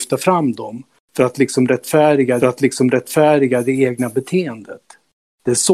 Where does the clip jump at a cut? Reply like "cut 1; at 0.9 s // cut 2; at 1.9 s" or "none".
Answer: cut 1; at 2.4 s